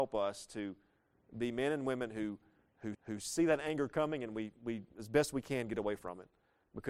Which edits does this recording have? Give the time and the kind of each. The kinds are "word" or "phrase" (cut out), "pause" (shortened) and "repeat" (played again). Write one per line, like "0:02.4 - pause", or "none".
0:02.9 - repeat